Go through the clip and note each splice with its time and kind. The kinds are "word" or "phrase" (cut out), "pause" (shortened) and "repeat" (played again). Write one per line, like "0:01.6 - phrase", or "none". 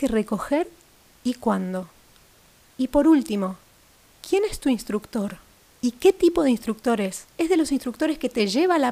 0:05.7 - pause